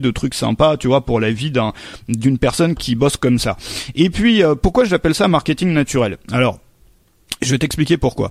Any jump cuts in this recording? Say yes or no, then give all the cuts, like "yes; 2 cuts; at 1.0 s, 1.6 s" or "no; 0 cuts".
yes; 1 cut; at 2.8 s